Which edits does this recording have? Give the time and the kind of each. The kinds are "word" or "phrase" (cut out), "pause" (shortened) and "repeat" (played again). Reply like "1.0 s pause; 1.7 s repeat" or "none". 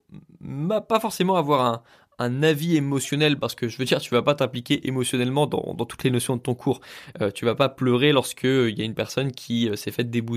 none